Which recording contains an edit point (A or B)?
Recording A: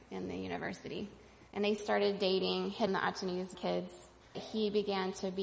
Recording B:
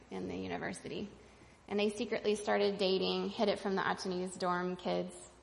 A